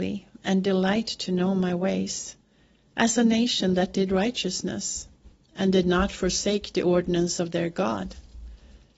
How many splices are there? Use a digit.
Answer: 0